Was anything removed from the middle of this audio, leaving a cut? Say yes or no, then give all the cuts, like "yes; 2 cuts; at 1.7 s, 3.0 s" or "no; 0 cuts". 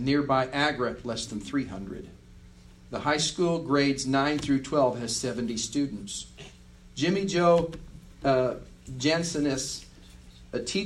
no; 0 cuts